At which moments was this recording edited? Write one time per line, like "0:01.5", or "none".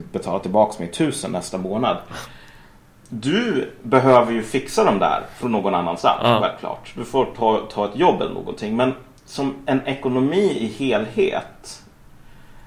none